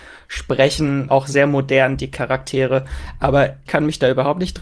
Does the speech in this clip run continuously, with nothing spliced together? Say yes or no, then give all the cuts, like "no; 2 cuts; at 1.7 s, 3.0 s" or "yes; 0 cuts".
no; 2 cuts; at 1.1 s, 3.7 s